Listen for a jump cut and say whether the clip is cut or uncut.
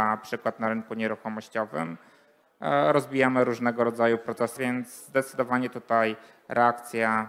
cut